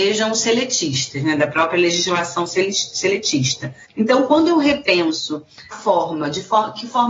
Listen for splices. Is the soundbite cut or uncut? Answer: cut